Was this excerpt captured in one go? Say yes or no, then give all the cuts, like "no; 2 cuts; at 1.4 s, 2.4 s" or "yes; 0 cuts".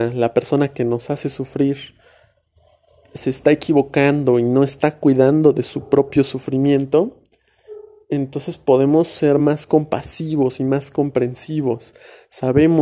yes; 0 cuts